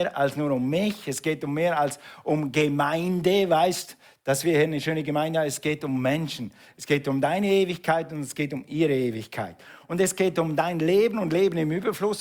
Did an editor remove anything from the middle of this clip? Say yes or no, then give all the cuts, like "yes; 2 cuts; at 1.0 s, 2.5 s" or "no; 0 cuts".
no; 0 cuts